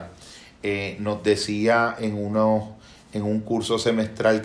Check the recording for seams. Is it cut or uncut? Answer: uncut